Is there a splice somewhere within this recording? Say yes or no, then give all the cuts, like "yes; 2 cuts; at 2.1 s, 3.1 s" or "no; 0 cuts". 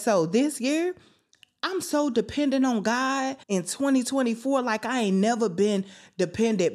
yes; 1 cut; at 3.4 s